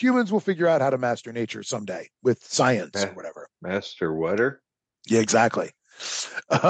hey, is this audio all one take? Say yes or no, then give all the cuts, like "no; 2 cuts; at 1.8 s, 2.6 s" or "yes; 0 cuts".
yes; 0 cuts